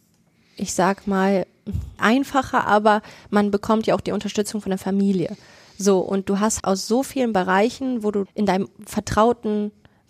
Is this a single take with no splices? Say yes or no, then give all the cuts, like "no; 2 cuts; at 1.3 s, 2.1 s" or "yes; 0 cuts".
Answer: no; 3 cuts; at 2.0 s, 6.6 s, 8.3 s